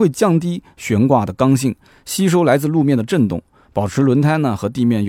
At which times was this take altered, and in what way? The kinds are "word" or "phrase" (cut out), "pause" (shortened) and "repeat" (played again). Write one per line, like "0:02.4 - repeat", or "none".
none